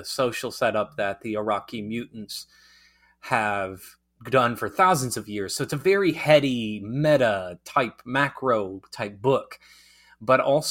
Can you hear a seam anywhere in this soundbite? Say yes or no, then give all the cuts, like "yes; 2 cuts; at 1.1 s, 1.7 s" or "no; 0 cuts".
no; 0 cuts